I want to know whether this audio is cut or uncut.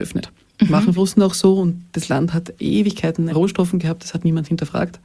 cut